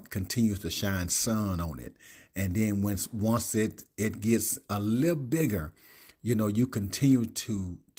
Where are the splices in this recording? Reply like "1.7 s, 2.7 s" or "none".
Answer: none